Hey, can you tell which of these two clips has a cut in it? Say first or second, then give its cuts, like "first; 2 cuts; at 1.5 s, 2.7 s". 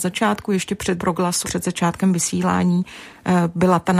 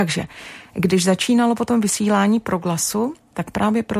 first; 2 cuts; at 1.0 s, 1.4 s